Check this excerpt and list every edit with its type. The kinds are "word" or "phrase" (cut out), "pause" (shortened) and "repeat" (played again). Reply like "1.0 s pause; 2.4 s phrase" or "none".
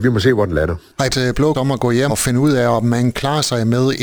1.1 s word; 1.5 s word; 2.1 s word; 3.1 s word